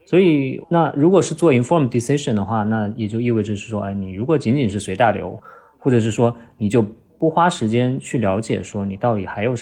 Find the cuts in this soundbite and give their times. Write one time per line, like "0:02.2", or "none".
none